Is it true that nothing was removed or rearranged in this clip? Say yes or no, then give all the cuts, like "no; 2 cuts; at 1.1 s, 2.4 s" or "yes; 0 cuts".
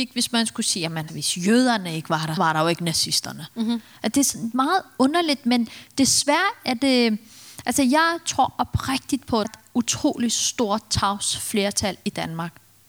no; 3 cuts; at 1.1 s, 2.4 s, 9.4 s